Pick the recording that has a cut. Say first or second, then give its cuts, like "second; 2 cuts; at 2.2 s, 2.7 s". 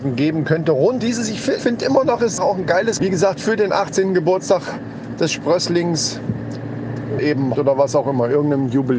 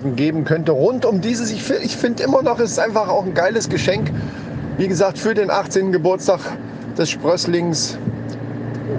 first; 6 cuts; at 1.0 s, 1.6 s, 2.4 s, 3.0 s, 7.2 s, 7.5 s